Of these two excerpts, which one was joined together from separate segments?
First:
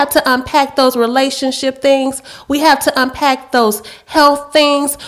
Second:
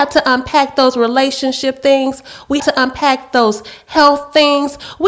second; 1 cut; at 2.6 s

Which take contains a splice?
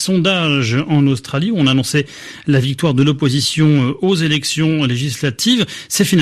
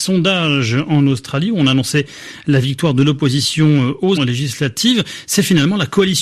second; 1 cut; at 4.2 s

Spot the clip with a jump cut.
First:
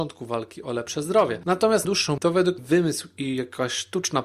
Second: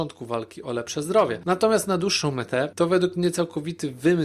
first; 3 cuts; at 1.8 s, 2.2 s, 2.6 s

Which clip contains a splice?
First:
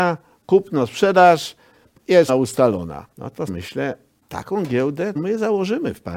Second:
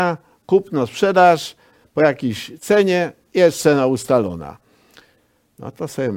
first; 6 cuts; at 2.0 s, 2.3 s, 3.1 s, 3.5 s, 4.2 s, 5.2 s

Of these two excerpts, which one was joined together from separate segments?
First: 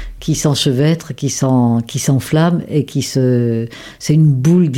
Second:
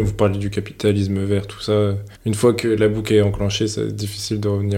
second; 1 cut; at 2.1 s

